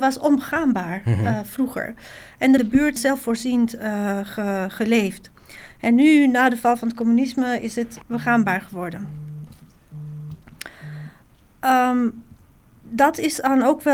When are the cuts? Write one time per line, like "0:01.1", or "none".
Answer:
0:02.6
0:03.0
0:08.0